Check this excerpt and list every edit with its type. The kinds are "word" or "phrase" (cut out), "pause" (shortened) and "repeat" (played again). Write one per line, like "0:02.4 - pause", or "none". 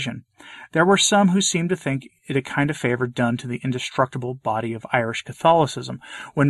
none